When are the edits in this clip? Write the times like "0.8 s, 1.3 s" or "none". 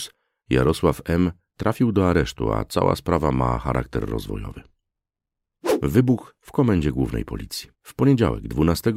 7.7 s